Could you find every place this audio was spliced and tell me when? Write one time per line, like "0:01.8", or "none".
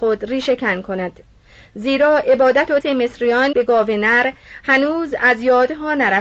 0:02.8
0:03.5